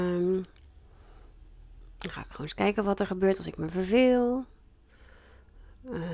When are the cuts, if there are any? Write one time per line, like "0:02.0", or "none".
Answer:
none